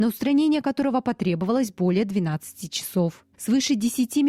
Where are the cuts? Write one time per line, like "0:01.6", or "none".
0:03.3